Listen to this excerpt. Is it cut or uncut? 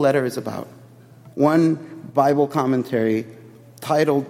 cut